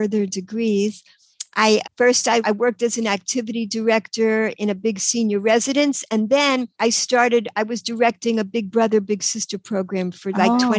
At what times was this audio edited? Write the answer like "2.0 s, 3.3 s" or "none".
1.8 s, 2.4 s, 6.7 s